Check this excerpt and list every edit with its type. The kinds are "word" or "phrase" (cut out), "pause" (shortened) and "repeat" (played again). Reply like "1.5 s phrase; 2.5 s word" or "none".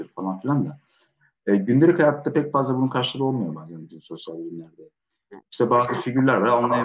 none